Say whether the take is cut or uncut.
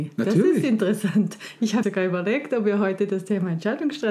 cut